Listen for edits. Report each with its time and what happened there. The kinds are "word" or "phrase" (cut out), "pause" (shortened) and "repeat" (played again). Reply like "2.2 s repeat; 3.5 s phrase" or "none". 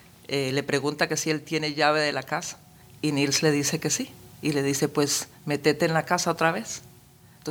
none